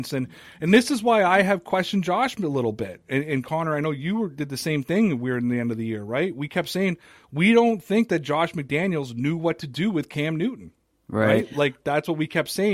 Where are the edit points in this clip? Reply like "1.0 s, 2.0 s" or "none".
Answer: none